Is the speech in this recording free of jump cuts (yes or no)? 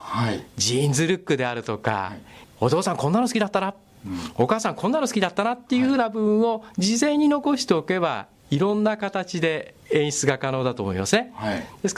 yes